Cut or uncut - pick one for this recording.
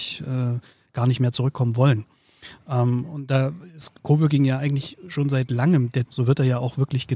cut